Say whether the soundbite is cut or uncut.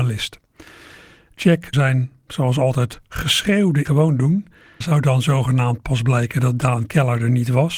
cut